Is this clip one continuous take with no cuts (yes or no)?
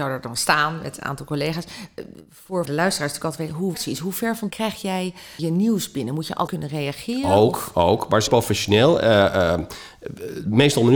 no